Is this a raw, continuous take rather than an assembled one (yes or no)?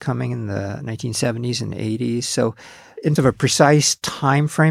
no